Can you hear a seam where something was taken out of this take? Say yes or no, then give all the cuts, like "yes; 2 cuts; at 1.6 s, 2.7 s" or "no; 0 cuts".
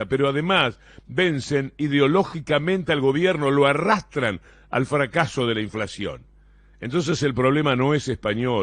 no; 0 cuts